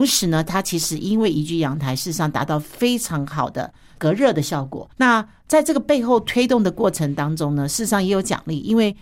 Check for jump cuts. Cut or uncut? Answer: cut